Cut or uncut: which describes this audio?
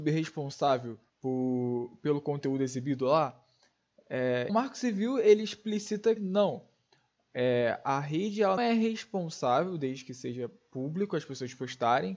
cut